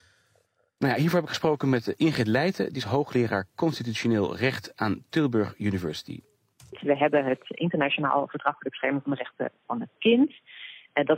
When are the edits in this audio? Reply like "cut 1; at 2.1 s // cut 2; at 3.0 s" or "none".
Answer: none